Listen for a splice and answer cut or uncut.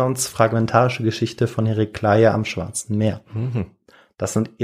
uncut